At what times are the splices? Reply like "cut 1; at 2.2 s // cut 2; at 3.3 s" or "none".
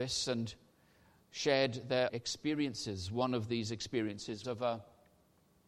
cut 1; at 2.1 s // cut 2; at 4.4 s